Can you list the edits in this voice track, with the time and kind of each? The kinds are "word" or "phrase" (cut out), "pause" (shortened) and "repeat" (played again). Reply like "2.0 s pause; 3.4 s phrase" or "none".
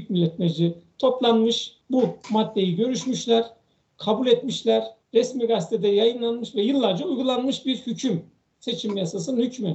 1.8 s pause; 5.0 s pause